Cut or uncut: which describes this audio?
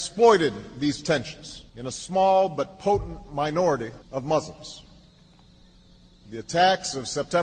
cut